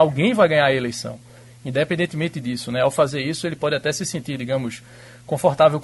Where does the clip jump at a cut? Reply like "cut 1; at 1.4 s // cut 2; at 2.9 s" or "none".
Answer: none